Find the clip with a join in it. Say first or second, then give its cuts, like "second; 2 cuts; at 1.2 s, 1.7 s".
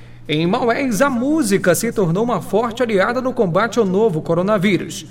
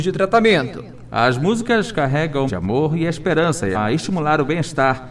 second; 2 cuts; at 2.5 s, 3.7 s